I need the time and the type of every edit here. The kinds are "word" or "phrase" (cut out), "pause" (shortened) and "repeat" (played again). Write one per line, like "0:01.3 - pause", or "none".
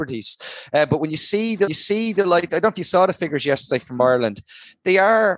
0:01.7 - repeat